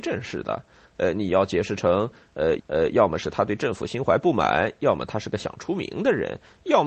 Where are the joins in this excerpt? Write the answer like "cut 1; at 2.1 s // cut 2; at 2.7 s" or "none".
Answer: cut 1; at 2.6 s